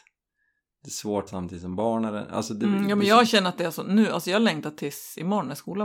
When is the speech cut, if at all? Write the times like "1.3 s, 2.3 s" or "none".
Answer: 1.3 s